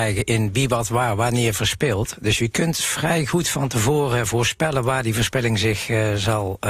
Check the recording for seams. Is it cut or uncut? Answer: uncut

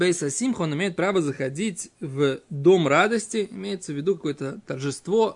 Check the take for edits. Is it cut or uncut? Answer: uncut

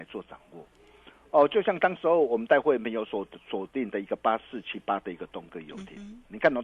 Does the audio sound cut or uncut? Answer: uncut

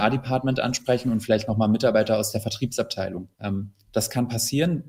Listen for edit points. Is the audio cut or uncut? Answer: cut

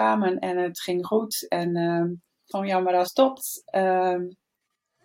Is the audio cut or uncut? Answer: cut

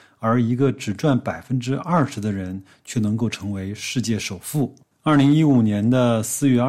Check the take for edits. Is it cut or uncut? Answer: uncut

